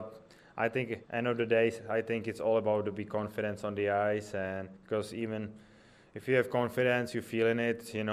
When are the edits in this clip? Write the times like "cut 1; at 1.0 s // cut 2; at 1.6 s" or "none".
cut 1; at 1.0 s // cut 2; at 4.8 s